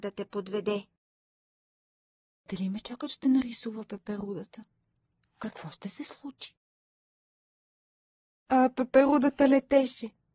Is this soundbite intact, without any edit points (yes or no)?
yes